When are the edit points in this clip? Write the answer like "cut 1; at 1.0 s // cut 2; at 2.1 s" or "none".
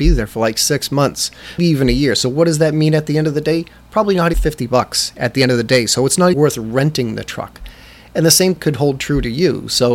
cut 1; at 1.6 s // cut 2; at 4.3 s // cut 3; at 6.3 s // cut 4; at 8.6 s